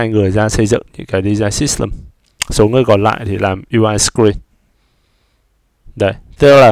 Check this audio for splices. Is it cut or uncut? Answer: uncut